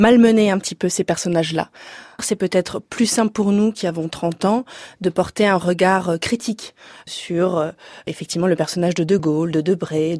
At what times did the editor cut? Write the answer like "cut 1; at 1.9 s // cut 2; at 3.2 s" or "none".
none